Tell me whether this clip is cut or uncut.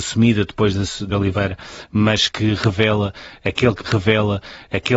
cut